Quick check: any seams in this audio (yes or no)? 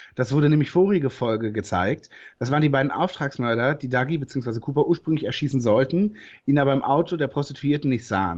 no